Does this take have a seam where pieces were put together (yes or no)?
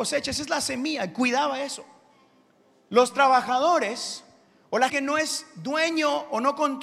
yes